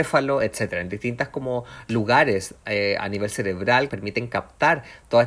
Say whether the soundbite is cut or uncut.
cut